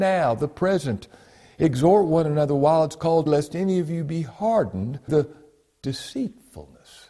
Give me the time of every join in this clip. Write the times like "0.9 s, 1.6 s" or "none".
3.3 s, 5.1 s